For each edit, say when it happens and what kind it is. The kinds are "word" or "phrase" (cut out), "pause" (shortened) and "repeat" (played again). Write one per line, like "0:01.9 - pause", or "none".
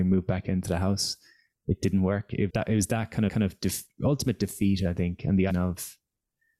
0:02.5 - word
0:03.3 - repeat
0:05.5 - word